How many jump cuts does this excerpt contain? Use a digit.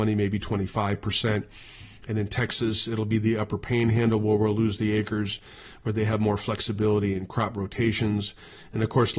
0